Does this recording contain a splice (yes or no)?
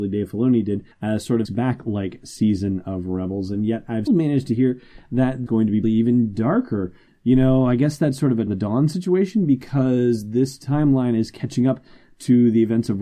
yes